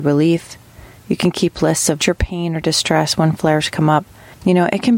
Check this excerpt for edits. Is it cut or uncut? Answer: cut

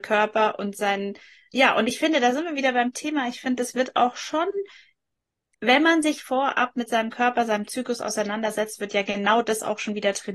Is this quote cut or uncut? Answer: uncut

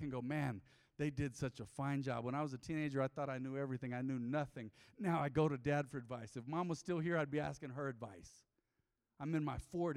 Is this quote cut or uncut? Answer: uncut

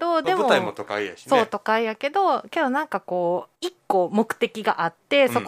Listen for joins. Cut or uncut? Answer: cut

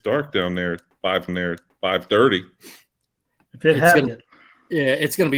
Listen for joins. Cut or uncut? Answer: cut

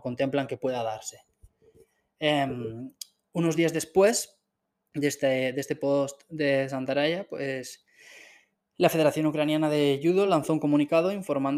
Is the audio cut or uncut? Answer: uncut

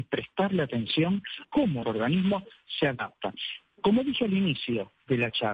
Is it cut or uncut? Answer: cut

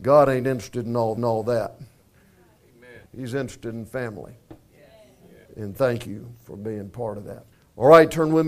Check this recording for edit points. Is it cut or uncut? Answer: cut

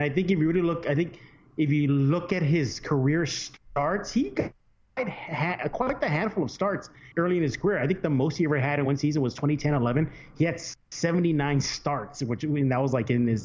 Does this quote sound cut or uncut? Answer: cut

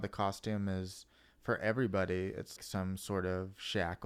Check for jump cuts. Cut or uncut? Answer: cut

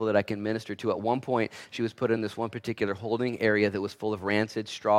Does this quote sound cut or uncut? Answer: uncut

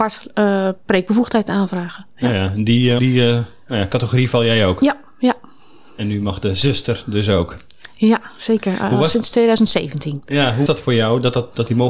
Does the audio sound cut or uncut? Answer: cut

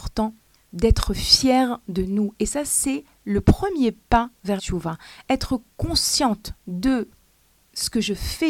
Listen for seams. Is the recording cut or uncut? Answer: cut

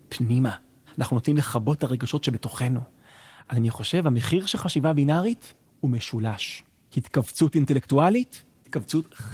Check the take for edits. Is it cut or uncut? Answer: uncut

